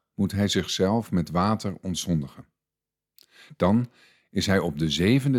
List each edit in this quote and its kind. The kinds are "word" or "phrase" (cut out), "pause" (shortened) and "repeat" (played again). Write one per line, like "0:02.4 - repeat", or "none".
none